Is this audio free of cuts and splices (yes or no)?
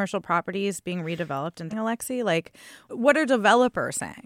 no